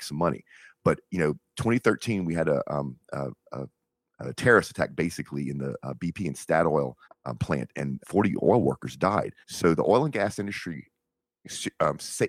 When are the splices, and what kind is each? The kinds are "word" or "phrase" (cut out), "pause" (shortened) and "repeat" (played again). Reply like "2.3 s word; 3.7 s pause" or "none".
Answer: 7.0 s pause; 8.0 s word; 9.4 s pause